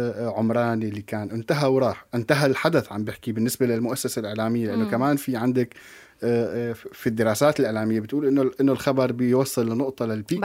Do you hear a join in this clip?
no; 0 cuts

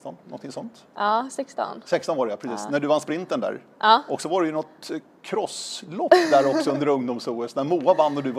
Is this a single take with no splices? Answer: yes; 0 cuts

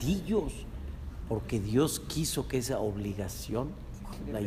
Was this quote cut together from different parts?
no; 0 cuts

